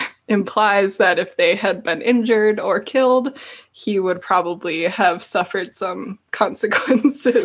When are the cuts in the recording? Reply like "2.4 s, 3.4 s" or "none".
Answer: 6.3 s